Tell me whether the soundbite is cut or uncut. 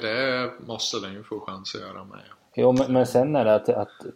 uncut